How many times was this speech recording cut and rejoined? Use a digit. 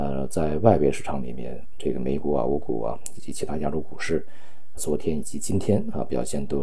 1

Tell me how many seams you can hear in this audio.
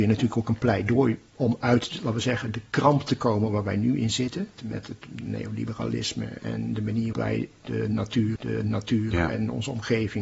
4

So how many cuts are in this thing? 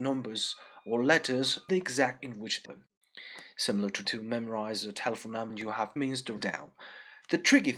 7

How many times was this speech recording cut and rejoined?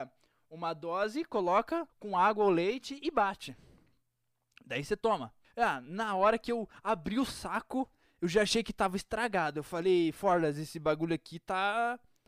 2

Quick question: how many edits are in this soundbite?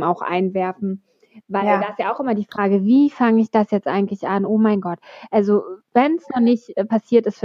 0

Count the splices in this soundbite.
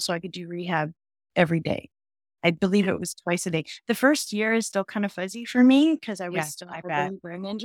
0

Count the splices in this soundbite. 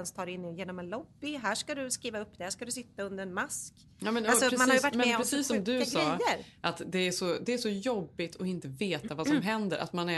0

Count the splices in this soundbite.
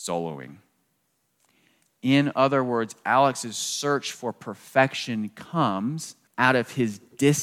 1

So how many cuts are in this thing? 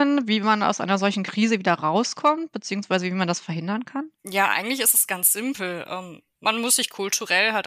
1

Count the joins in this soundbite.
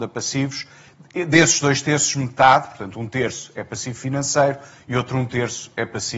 0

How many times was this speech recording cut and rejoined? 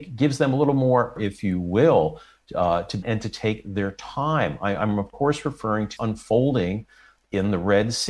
3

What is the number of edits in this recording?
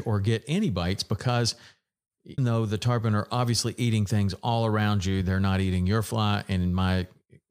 1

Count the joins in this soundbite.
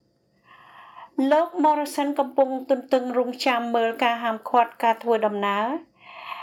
0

